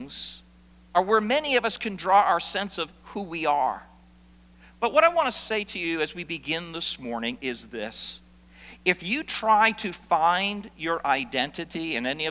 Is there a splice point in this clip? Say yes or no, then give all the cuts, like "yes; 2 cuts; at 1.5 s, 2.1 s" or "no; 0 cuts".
no; 0 cuts